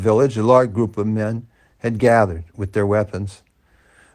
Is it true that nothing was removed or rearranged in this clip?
yes; 0 cuts

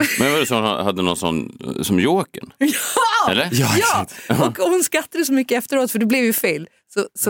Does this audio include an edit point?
no; 0 cuts

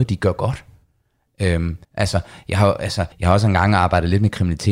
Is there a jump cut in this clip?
yes; 2 cuts; at 1.8 s, 3.1 s

